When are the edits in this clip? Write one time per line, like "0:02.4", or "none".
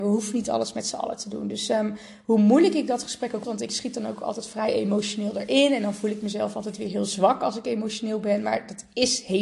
0:03.4